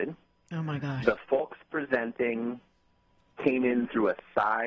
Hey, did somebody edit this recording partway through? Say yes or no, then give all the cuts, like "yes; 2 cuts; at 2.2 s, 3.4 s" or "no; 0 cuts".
no; 0 cuts